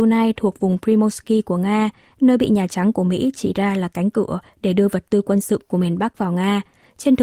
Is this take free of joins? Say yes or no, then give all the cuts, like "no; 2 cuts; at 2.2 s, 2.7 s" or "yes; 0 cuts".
yes; 0 cuts